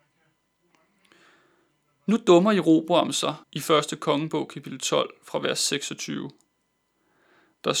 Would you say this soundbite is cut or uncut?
cut